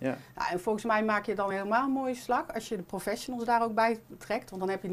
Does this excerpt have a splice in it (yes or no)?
no